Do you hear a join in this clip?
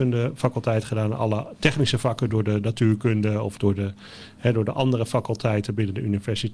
no; 0 cuts

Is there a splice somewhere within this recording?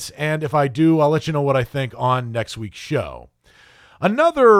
no; 0 cuts

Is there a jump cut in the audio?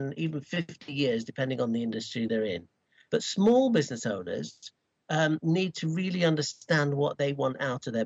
no; 0 cuts

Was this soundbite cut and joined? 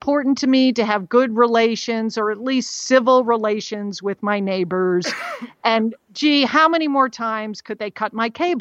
no; 0 cuts

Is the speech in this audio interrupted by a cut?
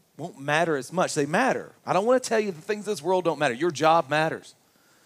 no; 0 cuts

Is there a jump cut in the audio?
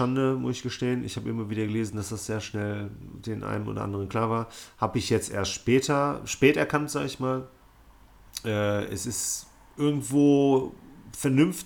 no; 0 cuts

